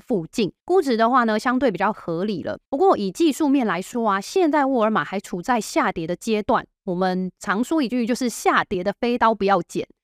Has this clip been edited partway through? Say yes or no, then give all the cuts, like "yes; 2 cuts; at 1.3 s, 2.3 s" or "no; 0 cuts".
no; 0 cuts